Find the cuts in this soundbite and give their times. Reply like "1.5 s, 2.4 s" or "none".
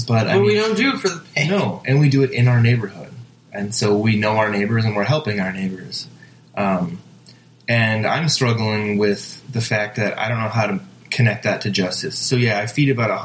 none